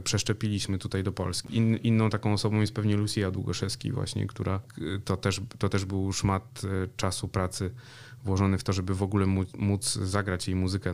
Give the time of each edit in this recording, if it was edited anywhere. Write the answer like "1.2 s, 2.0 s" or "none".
none